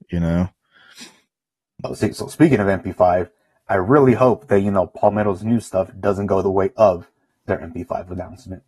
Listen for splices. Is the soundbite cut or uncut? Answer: uncut